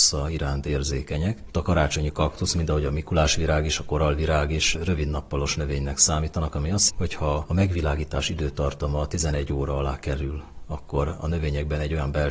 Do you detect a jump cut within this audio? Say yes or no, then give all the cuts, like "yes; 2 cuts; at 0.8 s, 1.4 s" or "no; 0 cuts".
yes; 2 cuts; at 1.5 s, 6.9 s